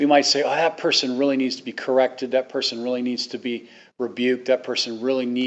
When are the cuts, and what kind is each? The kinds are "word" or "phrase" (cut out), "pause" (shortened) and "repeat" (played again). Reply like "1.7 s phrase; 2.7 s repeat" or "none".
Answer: none